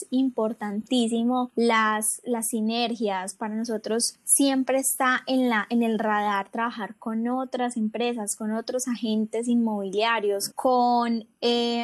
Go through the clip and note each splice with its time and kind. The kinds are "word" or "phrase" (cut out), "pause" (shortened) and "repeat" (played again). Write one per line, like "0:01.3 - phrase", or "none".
0:10.5 - word